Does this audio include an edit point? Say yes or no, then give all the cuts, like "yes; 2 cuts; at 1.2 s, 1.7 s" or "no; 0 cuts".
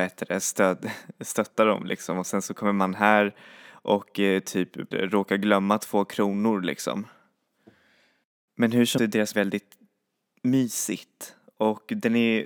yes; 3 cuts; at 4.9 s, 9.0 s, 9.3 s